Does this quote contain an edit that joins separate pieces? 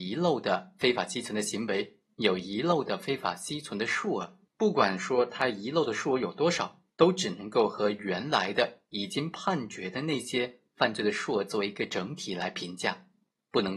yes; 2 cuts; at 4.5 s, 6.9 s

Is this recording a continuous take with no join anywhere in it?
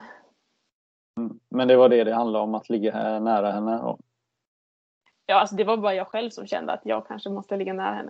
yes; 0 cuts

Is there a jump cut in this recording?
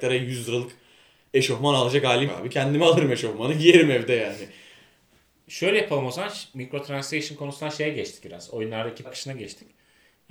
yes; 3 cuts; at 2.3 s, 6.5 s, 9.0 s

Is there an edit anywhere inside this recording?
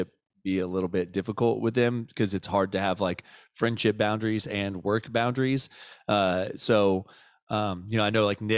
no; 0 cuts

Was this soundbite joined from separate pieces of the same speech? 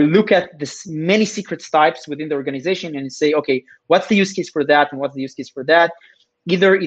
no; 0 cuts

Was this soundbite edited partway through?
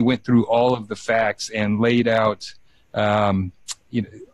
no; 0 cuts

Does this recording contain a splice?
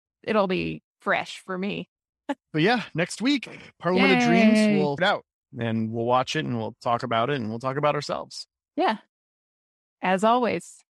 yes; 1 cut; at 5.0 s

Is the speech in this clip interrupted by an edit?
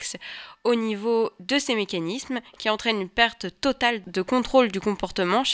no; 0 cuts

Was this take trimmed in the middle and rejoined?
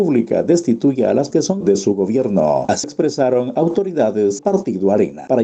yes; 4 cuts; at 1.3 s, 1.6 s, 2.8 s, 4.4 s

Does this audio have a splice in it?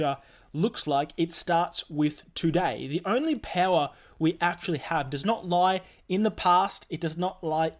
no; 0 cuts

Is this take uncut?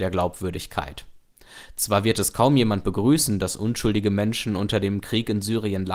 yes; 0 cuts

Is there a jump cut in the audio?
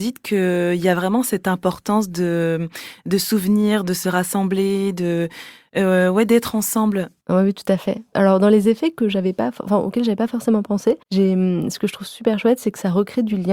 yes; 1 cut; at 11.0 s

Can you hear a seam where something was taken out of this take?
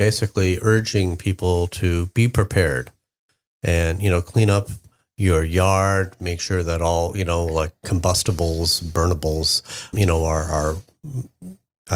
yes; 1 cut; at 9.9 s

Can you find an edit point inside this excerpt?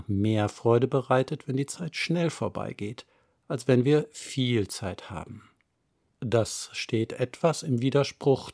no; 0 cuts

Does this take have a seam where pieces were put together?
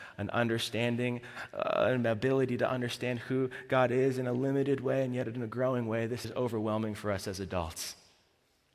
yes; 1 cut; at 6.2 s

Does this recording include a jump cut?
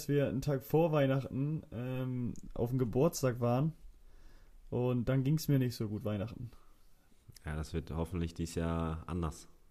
no; 0 cuts

